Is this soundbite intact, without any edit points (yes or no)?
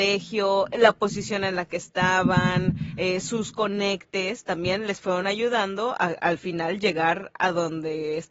yes